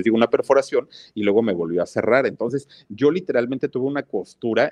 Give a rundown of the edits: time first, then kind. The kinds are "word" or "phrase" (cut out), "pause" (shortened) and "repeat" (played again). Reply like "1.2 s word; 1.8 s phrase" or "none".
none